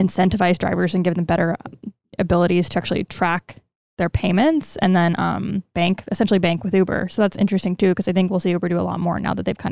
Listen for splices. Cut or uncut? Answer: uncut